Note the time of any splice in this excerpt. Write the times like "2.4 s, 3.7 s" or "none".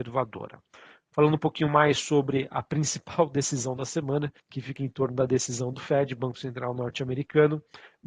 4.4 s